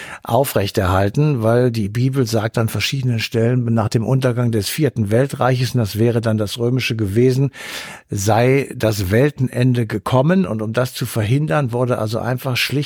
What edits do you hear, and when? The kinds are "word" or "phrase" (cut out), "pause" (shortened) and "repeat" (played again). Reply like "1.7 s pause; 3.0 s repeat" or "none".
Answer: none